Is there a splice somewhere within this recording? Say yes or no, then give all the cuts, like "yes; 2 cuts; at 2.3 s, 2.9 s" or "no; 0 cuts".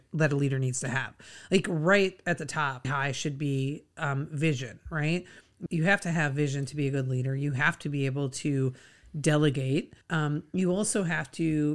yes; 3 cuts; at 2.8 s, 5.7 s, 10.0 s